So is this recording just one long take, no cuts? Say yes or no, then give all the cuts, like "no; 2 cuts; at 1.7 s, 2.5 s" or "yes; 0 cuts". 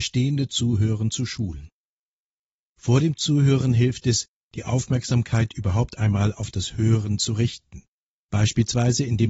yes; 0 cuts